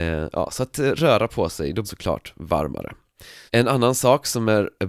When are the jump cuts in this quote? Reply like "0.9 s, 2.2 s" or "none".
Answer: 1.8 s, 3.5 s